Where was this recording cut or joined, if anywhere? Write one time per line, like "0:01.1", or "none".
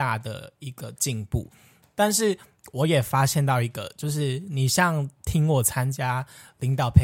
none

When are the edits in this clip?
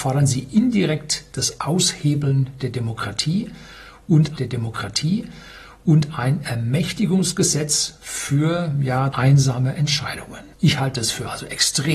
0:04.4
0:09.1
0:10.5

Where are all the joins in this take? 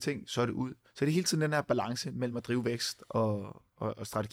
none

